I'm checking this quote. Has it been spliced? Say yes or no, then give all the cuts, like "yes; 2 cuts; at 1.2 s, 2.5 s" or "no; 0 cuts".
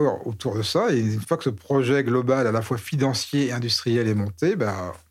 no; 0 cuts